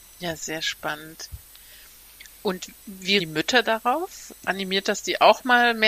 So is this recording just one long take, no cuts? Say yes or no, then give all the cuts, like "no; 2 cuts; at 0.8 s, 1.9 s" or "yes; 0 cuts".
no; 2 cuts; at 3.2 s, 4.4 s